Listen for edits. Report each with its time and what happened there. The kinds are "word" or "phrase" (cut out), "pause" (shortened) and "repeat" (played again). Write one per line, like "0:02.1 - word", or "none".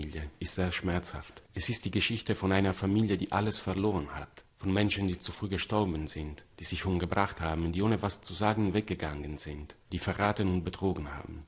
0:01.5 - pause
0:09.8 - pause